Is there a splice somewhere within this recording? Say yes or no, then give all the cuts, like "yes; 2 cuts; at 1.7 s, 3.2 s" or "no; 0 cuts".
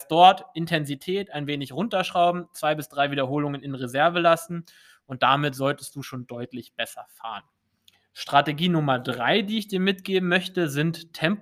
no; 0 cuts